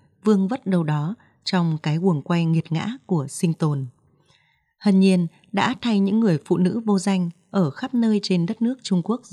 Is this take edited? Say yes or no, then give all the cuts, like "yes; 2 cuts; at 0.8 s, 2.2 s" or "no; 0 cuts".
no; 0 cuts